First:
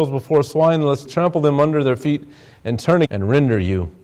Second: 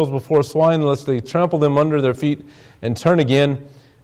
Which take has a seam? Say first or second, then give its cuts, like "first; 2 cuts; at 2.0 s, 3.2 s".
first; 2 cuts; at 1.0 s, 3.0 s